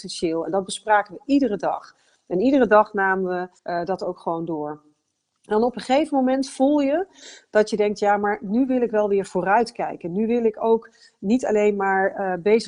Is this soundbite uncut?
no; 1 cut; at 3.6 s

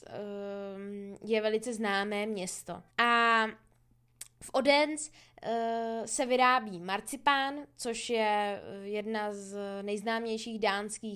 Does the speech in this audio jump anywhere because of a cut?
yes; 1 cut; at 2.9 s

